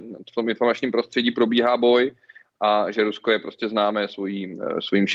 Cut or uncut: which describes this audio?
uncut